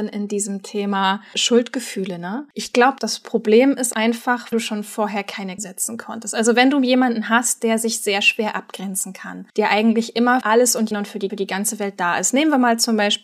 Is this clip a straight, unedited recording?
no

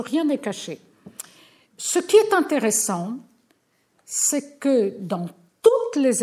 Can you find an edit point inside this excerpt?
no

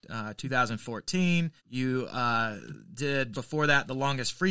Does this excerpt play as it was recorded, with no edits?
no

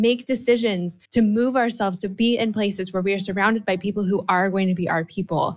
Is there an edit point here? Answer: yes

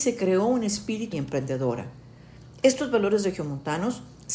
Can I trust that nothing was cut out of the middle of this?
no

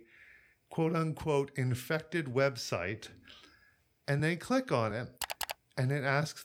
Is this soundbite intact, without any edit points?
yes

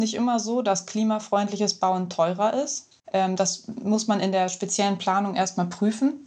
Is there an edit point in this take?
yes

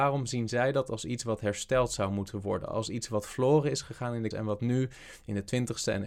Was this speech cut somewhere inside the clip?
yes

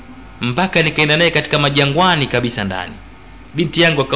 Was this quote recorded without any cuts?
yes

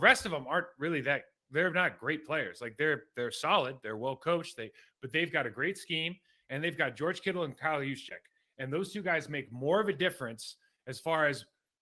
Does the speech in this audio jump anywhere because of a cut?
no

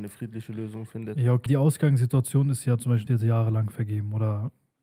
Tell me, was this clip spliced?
yes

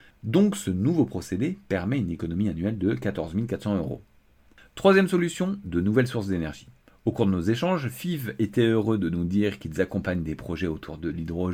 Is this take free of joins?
yes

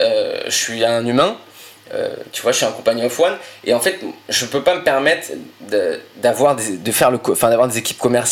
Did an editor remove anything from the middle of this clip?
no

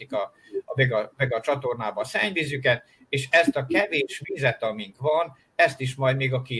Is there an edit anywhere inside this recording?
no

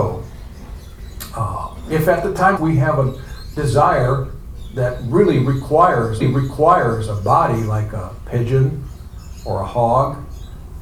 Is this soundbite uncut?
no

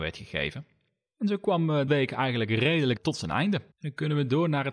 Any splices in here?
yes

